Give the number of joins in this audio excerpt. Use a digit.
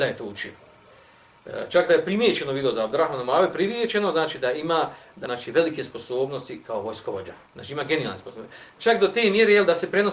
2